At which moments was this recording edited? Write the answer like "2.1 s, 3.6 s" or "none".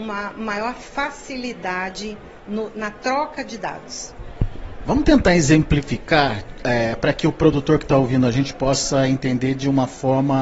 none